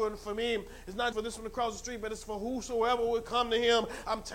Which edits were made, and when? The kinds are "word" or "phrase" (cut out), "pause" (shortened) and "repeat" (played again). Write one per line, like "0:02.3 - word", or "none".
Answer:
0:01.1 - word